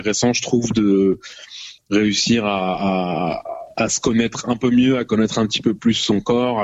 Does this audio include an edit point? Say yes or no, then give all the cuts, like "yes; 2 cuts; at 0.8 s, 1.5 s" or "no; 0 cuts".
yes; 1 cut; at 3.7 s